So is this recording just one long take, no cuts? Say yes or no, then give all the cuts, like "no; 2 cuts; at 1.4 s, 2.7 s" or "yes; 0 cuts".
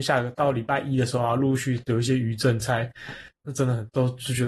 no; 1 cut; at 3.3 s